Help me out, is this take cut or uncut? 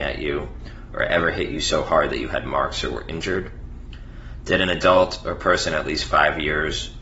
uncut